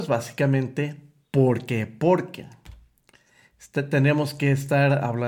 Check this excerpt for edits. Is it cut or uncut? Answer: uncut